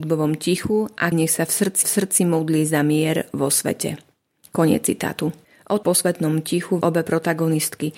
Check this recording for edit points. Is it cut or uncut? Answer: cut